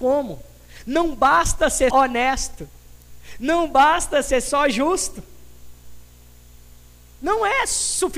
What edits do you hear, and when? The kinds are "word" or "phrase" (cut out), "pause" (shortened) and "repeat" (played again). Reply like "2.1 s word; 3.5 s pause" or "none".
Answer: 1.9 s word